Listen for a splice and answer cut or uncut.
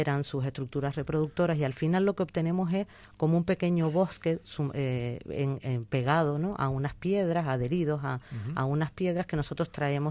uncut